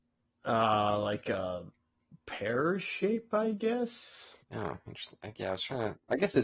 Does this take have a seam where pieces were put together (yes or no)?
yes